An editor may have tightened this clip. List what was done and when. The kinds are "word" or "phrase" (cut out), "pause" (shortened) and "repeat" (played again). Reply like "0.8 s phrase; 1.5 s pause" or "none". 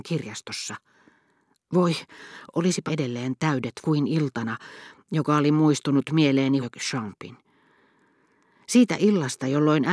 2.9 s word; 3.8 s word; 6.6 s phrase